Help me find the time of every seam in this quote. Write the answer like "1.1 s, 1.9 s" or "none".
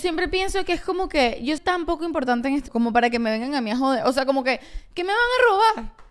1.6 s, 2.7 s